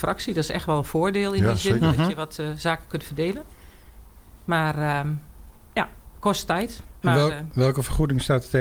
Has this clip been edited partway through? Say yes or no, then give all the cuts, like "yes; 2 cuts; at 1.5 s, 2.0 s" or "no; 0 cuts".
no; 0 cuts